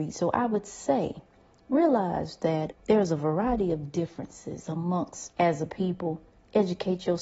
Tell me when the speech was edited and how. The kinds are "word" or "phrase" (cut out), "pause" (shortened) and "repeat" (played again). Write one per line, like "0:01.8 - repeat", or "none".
0:02.7 - word
0:05.3 - word